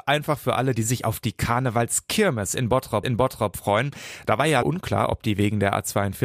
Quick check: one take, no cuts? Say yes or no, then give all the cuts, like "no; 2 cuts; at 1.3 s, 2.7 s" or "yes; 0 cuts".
no; 2 cuts; at 3.0 s, 4.6 s